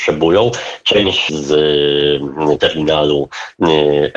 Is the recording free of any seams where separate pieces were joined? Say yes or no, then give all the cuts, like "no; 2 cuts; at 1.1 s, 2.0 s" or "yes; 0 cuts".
no; 1 cut; at 1.3 s